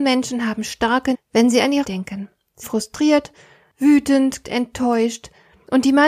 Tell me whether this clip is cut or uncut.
cut